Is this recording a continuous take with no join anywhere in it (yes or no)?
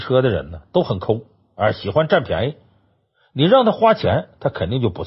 yes